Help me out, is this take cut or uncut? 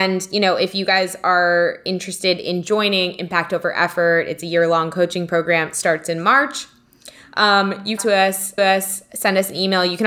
cut